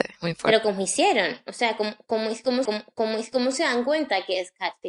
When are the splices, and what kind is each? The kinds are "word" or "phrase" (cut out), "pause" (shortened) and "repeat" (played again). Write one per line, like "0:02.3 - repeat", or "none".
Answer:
0:02.6 - repeat